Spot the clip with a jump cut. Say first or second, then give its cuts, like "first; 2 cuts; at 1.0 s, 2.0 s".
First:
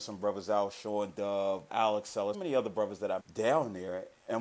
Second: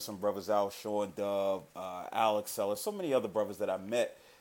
first; 3 cuts; at 1.7 s, 2.3 s, 3.2 s